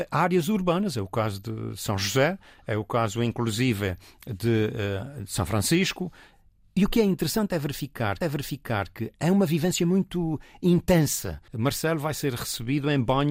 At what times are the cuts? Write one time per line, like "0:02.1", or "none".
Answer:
0:08.2
0:11.5